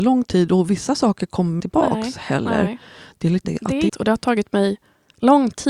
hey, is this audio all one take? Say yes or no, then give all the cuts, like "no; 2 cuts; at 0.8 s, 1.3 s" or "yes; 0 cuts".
no; 3 cuts; at 1.6 s, 3.4 s, 3.9 s